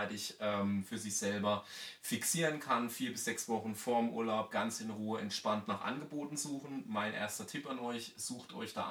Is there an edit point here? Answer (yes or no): no